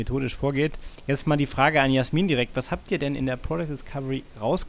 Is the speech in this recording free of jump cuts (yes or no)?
yes